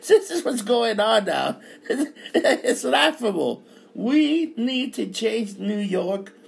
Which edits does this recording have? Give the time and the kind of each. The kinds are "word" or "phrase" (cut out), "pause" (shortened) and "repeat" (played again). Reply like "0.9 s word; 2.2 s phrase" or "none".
none

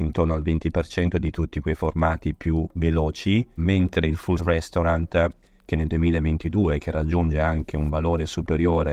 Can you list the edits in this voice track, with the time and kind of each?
3.6 s word; 4.4 s word

